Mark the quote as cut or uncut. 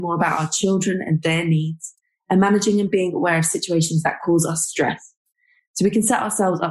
uncut